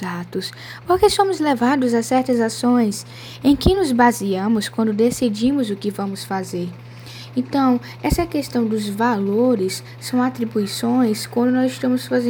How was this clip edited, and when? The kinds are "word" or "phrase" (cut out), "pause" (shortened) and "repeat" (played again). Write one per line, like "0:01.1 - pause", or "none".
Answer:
none